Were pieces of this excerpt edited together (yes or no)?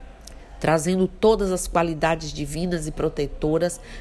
no